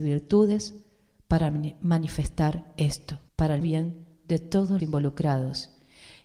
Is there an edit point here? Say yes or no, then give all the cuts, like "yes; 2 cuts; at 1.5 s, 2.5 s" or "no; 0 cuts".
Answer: yes; 3 cuts; at 3.3 s, 3.6 s, 4.8 s